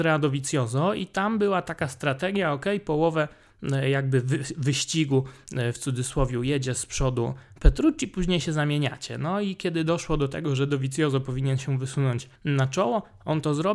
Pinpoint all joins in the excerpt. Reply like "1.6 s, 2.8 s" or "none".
12.4 s